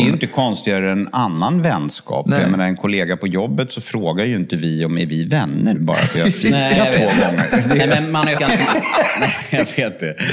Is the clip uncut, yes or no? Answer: no